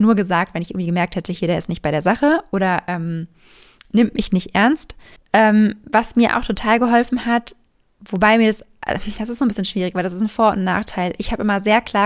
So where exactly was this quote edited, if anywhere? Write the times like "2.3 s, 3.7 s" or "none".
5.2 s